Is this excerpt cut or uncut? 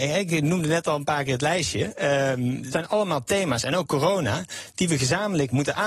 cut